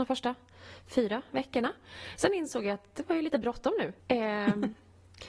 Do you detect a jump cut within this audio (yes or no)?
yes